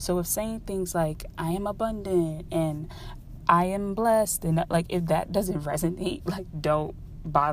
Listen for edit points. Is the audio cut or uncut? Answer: uncut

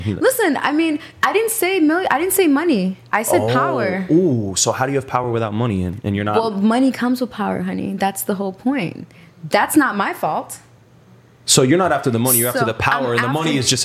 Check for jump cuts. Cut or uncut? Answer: uncut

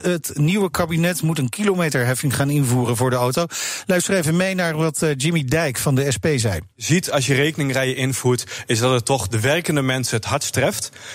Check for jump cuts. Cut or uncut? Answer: cut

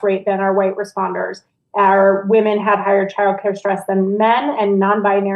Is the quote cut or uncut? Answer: uncut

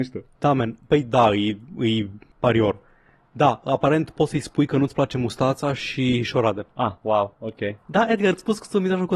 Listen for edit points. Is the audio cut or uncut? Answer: uncut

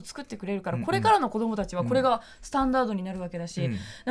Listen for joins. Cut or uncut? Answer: uncut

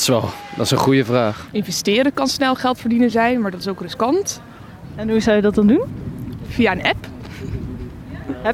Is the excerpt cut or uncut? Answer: uncut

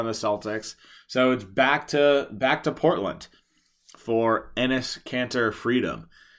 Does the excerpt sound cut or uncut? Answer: uncut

